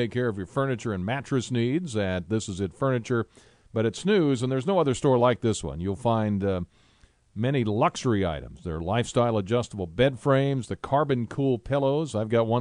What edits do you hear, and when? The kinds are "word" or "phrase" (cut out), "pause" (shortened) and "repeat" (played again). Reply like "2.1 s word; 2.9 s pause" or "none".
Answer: none